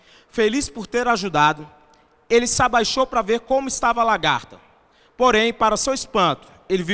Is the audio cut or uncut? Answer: uncut